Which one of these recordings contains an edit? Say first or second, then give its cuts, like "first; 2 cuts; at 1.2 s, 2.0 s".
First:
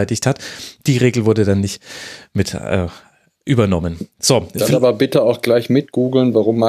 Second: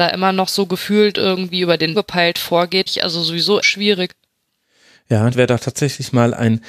second; 4 cuts; at 1.9 s, 2.9 s, 3.6 s, 5.3 s